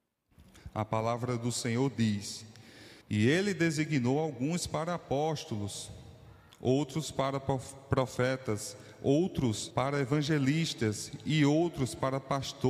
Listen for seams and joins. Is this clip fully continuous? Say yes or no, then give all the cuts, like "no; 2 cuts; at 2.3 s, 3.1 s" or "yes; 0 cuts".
no; 3 cuts; at 3.0 s, 6.5 s, 9.7 s